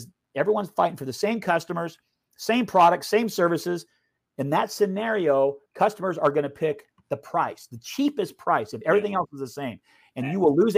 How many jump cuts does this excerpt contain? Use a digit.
1